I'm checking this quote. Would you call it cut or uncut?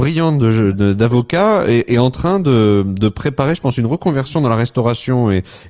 uncut